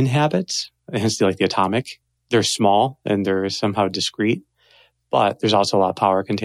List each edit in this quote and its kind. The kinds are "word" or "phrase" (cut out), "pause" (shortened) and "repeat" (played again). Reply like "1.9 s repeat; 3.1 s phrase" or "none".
none